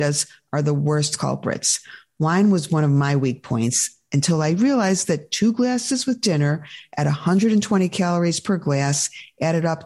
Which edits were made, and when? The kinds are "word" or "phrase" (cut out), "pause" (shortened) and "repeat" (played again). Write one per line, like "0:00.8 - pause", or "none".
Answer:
none